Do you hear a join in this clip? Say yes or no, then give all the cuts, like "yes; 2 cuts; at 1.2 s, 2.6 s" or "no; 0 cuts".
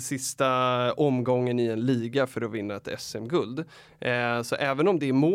no; 0 cuts